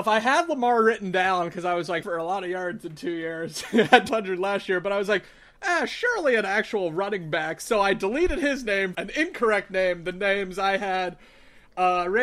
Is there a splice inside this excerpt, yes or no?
yes